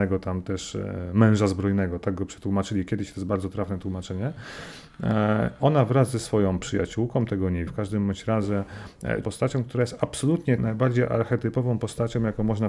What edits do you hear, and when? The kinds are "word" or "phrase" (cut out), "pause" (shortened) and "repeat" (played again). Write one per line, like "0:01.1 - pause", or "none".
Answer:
0:06.6 - word
0:07.7 - word
0:09.2 - word
0:10.6 - word